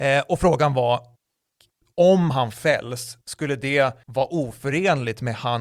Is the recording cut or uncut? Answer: cut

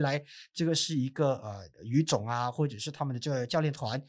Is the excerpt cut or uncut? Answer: cut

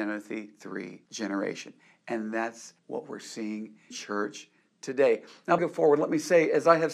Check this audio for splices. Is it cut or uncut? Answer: cut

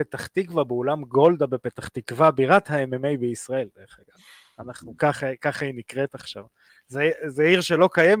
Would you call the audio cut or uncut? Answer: uncut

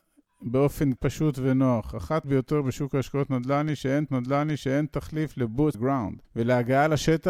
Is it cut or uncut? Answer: cut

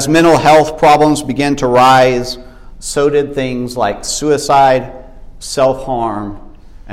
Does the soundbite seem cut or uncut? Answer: uncut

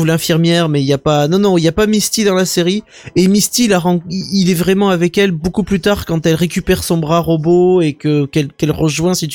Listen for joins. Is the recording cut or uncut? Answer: uncut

